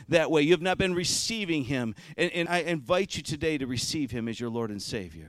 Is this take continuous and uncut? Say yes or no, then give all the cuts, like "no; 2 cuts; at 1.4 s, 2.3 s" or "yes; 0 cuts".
no; 1 cut; at 2.5 s